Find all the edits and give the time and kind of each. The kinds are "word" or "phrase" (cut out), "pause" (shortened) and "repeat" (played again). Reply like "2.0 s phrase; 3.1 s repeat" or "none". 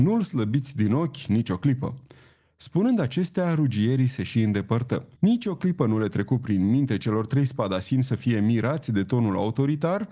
5.2 s pause